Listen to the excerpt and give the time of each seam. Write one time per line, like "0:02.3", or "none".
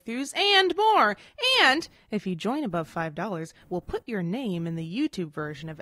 none